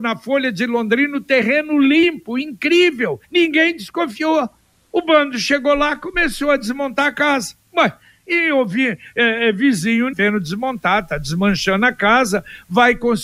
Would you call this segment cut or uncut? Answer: cut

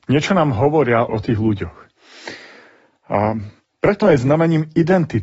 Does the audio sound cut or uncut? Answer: cut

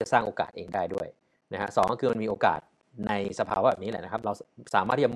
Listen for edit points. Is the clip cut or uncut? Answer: uncut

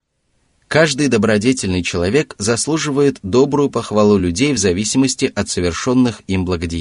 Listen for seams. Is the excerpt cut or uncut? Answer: uncut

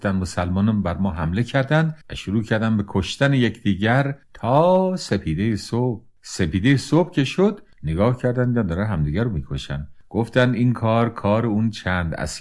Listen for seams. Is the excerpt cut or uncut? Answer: cut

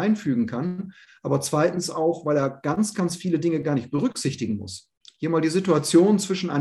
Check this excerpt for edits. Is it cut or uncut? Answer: uncut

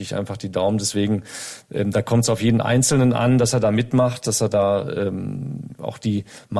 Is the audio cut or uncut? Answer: uncut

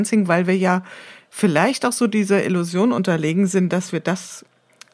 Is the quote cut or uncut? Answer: uncut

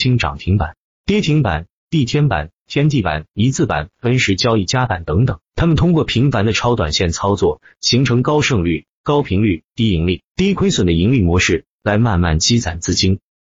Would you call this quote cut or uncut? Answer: cut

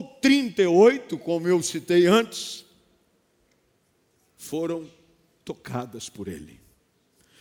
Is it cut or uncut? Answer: uncut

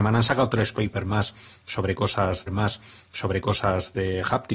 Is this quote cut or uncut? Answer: cut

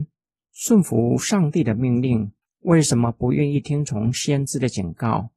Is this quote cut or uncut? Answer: cut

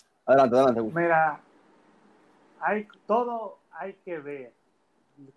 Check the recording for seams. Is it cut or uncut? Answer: cut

